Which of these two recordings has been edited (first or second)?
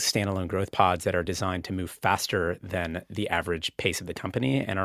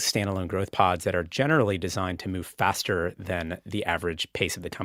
first